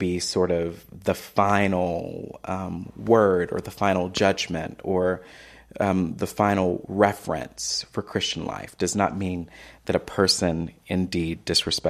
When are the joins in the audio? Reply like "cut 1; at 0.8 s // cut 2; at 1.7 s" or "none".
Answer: none